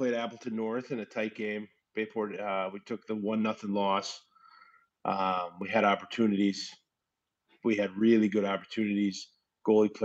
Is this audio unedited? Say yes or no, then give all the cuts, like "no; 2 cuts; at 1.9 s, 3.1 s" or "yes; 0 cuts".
yes; 0 cuts